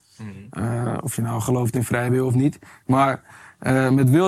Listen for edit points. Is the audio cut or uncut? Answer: uncut